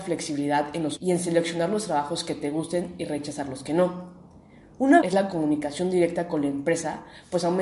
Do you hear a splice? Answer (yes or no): yes